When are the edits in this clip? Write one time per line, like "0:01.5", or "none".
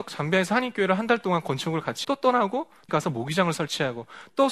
0:02.0
0:02.9